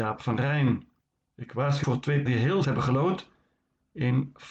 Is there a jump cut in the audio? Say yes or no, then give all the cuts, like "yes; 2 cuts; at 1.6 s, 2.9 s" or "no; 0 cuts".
yes; 3 cuts; at 1.8 s, 2.3 s, 2.6 s